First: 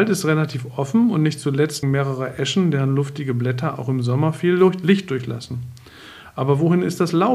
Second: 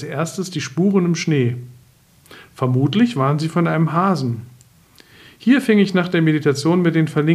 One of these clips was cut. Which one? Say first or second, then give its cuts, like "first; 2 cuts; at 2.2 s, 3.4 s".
first; 1 cut; at 1.8 s